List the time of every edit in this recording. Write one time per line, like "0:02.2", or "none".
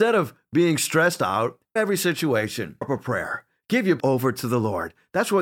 0:01.8
0:02.8
0:04.0